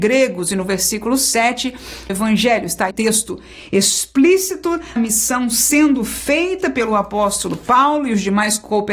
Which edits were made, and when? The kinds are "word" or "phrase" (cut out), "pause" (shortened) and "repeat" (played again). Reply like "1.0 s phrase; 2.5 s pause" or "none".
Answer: 2.1 s phrase; 2.9 s word; 5.0 s word